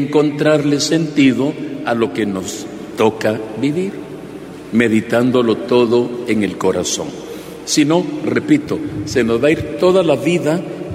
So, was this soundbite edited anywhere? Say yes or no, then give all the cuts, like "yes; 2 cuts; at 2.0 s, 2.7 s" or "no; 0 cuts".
no; 0 cuts